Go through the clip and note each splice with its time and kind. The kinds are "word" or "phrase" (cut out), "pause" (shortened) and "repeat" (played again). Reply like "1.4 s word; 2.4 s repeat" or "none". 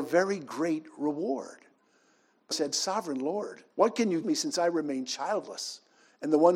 2.5 s word; 3.7 s pause; 4.2 s word